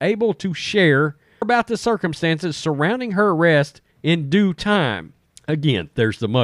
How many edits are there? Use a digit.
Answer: 3